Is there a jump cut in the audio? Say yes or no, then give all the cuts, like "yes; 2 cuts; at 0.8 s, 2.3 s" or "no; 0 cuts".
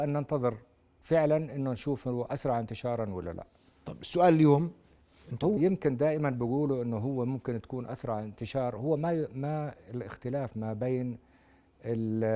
yes; 1 cut; at 5.6 s